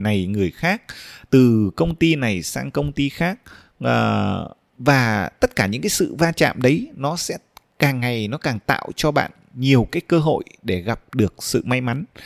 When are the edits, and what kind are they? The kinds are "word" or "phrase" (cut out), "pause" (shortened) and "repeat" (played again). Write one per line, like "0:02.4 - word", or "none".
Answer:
none